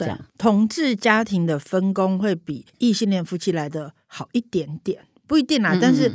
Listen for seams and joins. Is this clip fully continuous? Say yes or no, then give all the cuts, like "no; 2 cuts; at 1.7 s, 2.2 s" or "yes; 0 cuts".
no; 1 cut; at 2.7 s